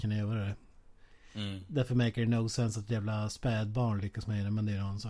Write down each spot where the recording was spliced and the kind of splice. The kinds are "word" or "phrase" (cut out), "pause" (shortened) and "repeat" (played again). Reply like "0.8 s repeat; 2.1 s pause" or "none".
none